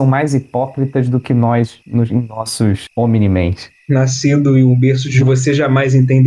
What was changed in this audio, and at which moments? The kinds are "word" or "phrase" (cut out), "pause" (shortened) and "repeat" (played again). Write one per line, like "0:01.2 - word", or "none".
0:05.2 - word